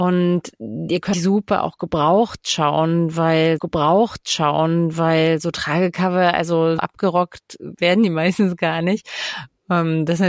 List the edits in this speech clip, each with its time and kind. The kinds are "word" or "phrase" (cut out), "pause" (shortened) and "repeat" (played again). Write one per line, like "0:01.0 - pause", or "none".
0:01.1 - word
0:03.6 - repeat
0:06.8 - word